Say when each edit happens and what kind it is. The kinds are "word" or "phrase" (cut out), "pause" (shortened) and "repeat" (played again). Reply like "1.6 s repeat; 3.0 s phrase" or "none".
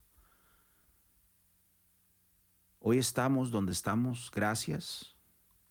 none